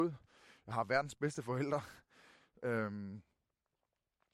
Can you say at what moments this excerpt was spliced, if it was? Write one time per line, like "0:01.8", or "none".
none